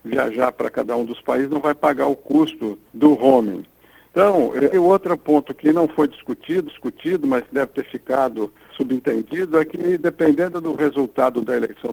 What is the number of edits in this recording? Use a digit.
4